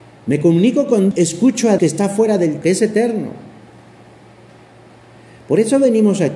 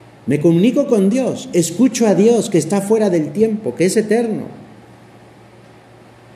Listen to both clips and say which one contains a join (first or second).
first